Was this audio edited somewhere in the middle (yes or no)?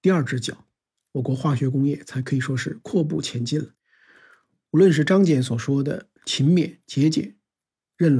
yes